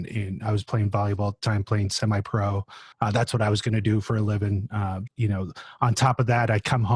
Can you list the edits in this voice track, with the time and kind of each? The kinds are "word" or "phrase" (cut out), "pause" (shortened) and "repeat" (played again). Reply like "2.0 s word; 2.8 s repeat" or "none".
2.9 s pause; 5.1 s word